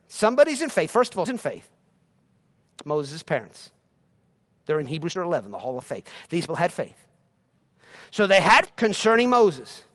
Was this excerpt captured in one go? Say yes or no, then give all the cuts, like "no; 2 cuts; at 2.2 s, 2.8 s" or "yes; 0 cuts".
no; 5 cuts; at 1.3 s, 5.2 s, 5.8 s, 6.5 s, 8.7 s